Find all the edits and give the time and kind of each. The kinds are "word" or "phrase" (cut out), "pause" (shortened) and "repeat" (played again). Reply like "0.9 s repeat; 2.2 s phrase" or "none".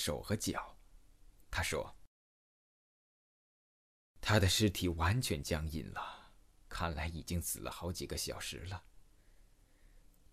none